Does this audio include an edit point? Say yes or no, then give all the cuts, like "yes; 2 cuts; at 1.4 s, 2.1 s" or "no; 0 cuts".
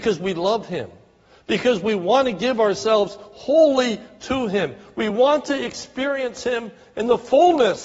no; 0 cuts